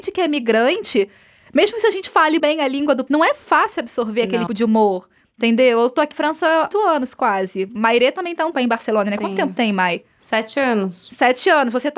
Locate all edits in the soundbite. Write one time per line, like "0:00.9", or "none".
0:02.4
0:03.1
0:04.5
0:06.1
0:06.7
0:08.5